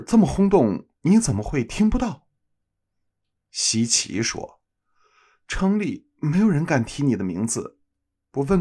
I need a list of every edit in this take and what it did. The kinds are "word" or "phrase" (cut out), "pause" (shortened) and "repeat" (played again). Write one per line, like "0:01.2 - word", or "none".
none